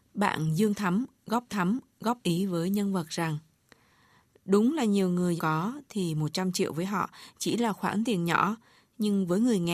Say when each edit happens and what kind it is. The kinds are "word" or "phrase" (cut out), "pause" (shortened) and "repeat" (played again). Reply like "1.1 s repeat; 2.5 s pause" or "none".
1.5 s repeat; 5.4 s word